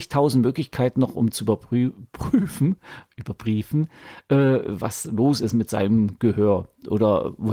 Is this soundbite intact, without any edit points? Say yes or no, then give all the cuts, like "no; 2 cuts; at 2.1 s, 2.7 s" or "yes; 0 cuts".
yes; 0 cuts